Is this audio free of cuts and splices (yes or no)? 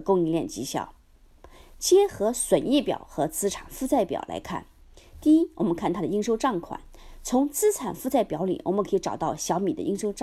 yes